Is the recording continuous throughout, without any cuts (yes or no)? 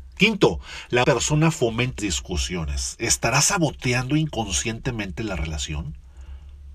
no